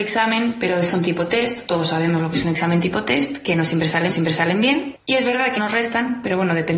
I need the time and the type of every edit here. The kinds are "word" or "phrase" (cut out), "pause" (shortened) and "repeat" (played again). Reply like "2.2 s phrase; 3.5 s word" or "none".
4.1 s repeat; 5.6 s phrase